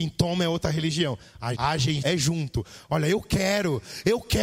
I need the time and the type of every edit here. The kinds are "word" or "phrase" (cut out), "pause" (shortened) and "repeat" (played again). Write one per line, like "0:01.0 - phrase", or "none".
0:01.5 - word
0:02.0 - word